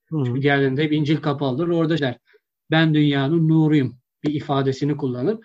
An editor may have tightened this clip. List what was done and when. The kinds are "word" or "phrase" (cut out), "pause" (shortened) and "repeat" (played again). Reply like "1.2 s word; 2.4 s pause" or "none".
2.0 s word